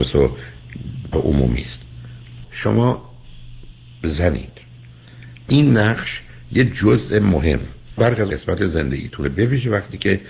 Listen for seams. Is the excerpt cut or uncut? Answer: cut